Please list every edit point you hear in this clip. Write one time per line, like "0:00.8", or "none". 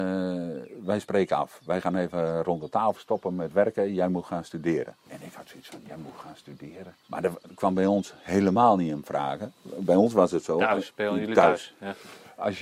0:02.9
0:05.0
0:07.0